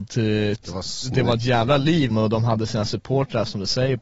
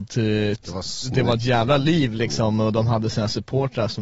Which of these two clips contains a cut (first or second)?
first